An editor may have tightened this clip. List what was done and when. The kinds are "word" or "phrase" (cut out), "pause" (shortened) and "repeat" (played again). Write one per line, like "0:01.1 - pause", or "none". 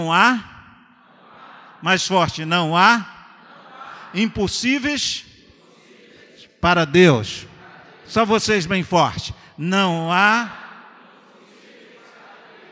none